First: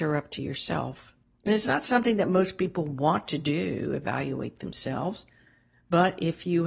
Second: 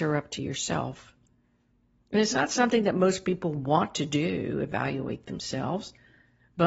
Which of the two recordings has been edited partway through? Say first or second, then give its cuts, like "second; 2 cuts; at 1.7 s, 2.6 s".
first; 1 cut; at 1.2 s